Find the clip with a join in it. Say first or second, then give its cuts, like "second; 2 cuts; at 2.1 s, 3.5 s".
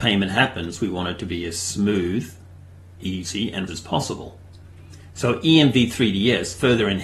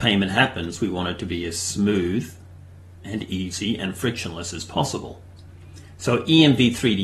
first; 2 cuts; at 3.0 s, 3.7 s